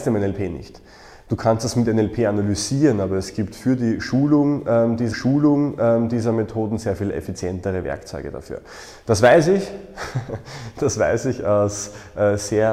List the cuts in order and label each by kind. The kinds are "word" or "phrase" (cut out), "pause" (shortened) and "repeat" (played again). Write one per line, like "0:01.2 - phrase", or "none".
0:05.1 - repeat

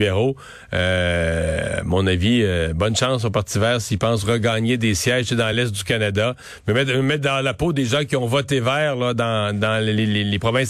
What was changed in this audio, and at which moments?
none

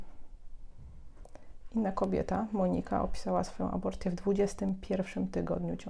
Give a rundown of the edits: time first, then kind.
none

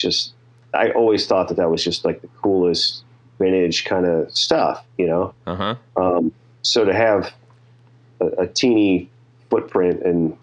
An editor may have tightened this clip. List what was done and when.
none

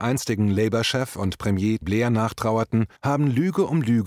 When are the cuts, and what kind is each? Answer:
0:01.8 - word
0:03.0 - pause

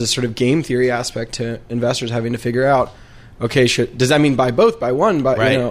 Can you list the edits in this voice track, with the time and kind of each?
none

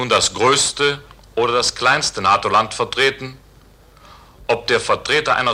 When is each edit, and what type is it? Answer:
none

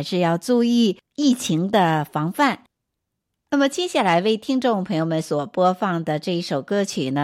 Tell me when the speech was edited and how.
none

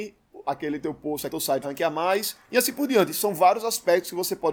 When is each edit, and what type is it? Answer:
0:01.3 - word
0:01.6 - word
0:02.4 - pause

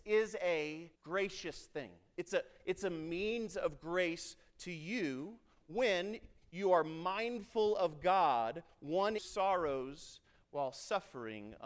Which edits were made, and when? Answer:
0:01.0 - pause
0:09.2 - word

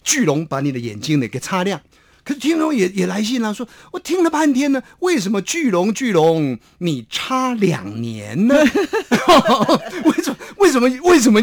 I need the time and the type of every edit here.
none

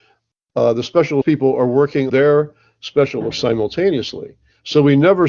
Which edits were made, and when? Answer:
0:01.2 - word
0:02.1 - word
0:03.3 - word

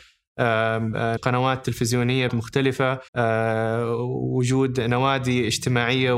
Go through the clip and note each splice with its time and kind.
0:01.2 - word
0:02.3 - word
0:03.1 - pause

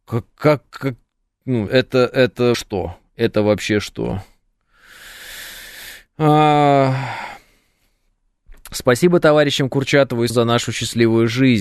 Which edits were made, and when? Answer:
0:01.7 - word
0:02.5 - word
0:10.3 - word

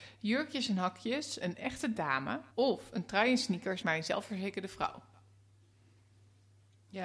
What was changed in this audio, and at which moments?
0:01.4 - phrase
0:02.5 - pause
0:03.8 - word

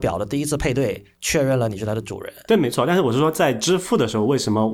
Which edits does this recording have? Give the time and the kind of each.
0:01.1 - pause

